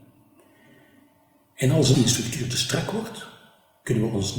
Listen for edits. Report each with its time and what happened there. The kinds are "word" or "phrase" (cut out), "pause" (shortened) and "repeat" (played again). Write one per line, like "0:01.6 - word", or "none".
0:01.9 - word